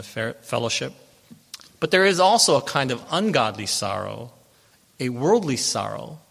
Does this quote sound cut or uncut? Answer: uncut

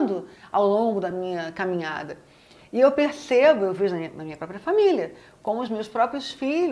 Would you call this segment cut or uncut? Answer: uncut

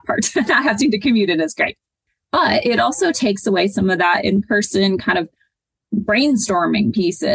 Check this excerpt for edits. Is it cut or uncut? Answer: uncut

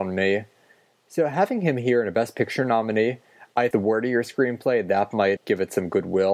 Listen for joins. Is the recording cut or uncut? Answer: cut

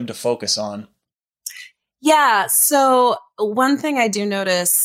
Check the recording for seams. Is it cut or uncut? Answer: uncut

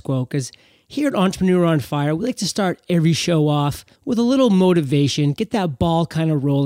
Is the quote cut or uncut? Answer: cut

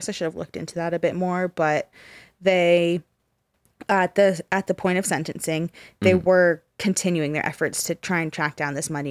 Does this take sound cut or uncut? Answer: uncut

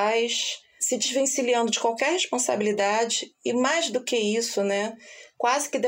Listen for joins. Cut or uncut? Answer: uncut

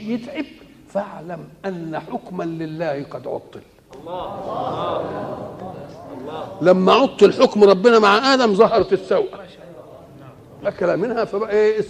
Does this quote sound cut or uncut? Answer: uncut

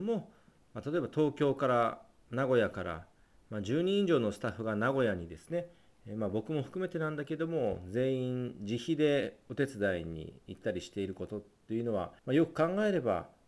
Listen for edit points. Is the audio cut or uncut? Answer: cut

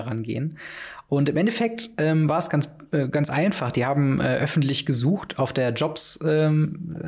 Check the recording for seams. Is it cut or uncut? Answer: uncut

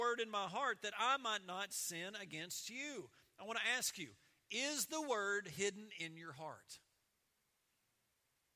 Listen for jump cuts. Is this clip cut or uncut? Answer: uncut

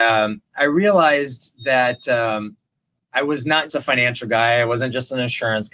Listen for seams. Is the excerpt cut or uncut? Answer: cut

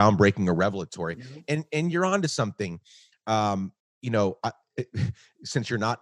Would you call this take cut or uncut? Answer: cut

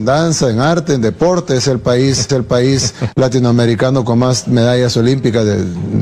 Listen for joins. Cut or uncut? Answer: cut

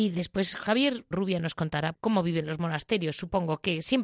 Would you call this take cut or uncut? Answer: cut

